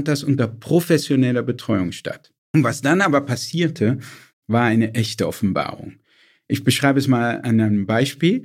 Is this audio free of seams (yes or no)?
yes